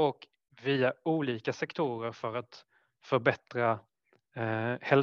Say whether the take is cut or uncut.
uncut